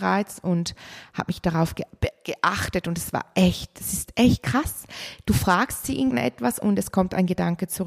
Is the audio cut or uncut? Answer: cut